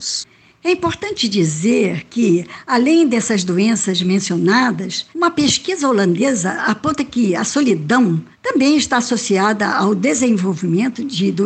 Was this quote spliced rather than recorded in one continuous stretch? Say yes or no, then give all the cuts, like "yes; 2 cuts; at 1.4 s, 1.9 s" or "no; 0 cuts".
yes; 2 cuts; at 5.1 s, 8.3 s